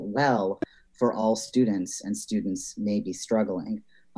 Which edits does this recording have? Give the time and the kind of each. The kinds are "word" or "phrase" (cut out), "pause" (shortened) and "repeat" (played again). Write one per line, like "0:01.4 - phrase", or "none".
none